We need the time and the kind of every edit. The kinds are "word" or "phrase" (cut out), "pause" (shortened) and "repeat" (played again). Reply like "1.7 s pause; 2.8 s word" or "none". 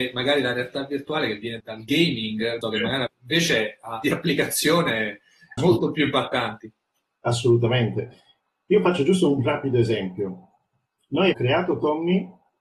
1.6 s word; 2.6 s word; 3.1 s word; 4.0 s word; 5.6 s word; 9.4 s word; 11.3 s word